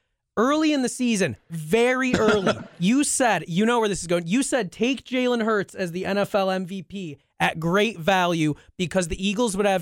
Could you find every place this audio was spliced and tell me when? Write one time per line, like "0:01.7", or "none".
none